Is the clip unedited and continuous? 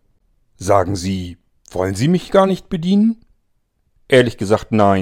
yes; 0 cuts

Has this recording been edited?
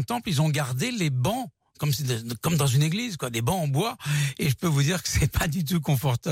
no; 0 cuts

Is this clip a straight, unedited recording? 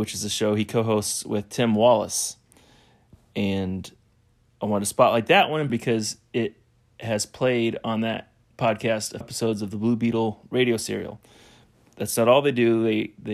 no; 2 cuts; at 5.7 s, 9.2 s

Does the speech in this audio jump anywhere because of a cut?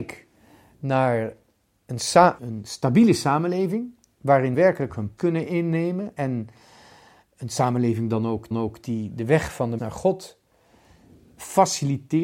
yes; 5 cuts; at 2.4 s, 4.5 s, 5.2 s, 8.5 s, 9.8 s

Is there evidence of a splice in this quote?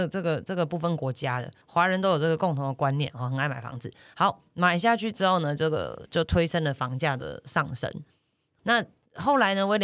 yes; 2 cuts; at 1.6 s, 8.6 s

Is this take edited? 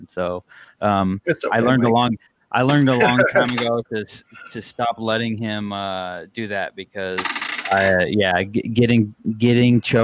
no; 0 cuts

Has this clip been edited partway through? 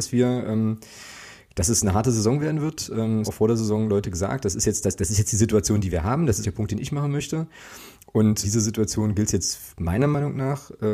yes; 3 cuts; at 3.2 s, 6.4 s, 8.4 s

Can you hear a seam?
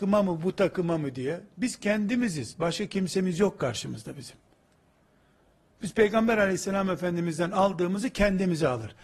no; 0 cuts

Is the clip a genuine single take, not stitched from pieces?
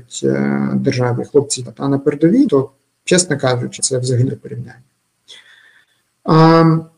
no; 4 cuts; at 1.6 s, 2.4 s, 3.8 s, 4.3 s

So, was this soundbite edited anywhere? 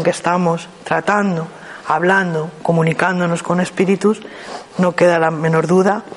no; 0 cuts

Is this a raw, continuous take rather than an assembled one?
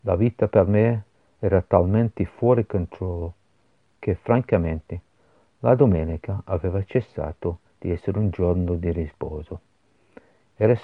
no; 1 cut; at 1.1 s

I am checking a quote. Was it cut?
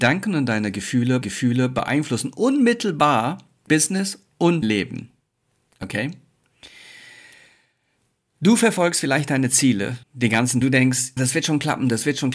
yes; 6 cuts; at 1.2 s, 3.7 s, 4.6 s, 10.0 s, 10.6 s, 11.2 s

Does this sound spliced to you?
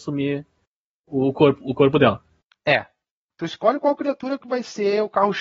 no; 0 cuts

